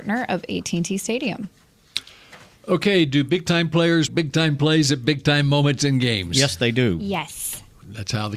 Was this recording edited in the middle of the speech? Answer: yes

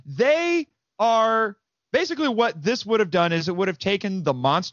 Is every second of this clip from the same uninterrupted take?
yes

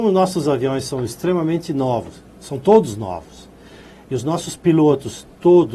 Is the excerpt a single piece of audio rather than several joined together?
yes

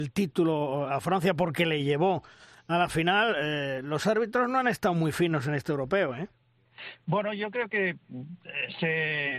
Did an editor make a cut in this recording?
no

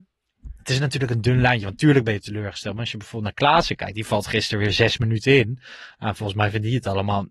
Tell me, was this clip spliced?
no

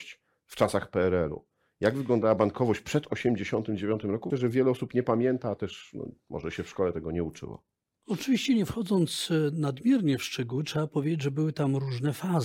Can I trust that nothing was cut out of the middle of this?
no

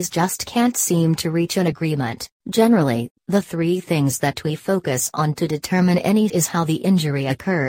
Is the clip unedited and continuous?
no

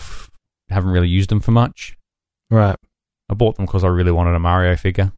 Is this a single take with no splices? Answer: yes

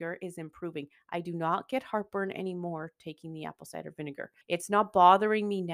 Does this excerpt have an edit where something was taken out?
yes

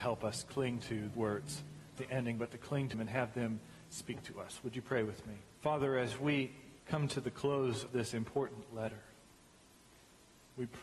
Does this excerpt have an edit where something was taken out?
yes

